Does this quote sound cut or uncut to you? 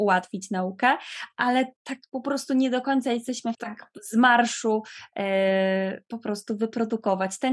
cut